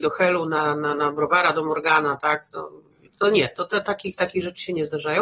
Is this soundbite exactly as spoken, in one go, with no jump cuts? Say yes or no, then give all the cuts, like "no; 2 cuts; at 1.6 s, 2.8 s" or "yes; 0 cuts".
yes; 0 cuts